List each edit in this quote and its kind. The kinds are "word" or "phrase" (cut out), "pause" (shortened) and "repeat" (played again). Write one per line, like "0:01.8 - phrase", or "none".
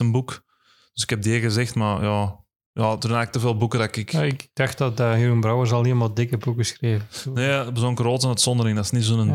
0:02.5 - pause